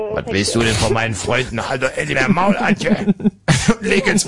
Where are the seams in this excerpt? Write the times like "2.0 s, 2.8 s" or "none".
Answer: 2.1 s